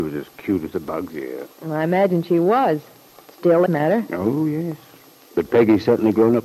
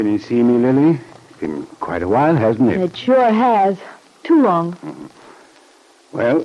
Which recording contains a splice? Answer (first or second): first